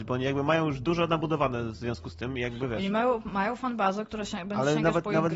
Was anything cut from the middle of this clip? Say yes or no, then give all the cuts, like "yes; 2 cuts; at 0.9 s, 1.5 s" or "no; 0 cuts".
no; 0 cuts